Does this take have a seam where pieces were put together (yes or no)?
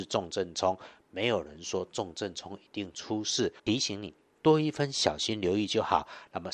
yes